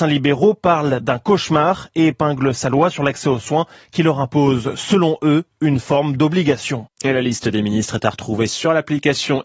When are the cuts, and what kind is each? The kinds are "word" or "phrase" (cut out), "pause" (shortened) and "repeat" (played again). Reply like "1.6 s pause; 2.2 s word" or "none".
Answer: none